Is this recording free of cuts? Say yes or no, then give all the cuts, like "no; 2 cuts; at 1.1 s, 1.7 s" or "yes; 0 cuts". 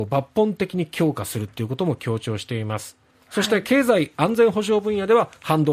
yes; 0 cuts